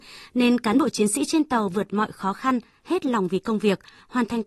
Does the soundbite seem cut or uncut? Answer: uncut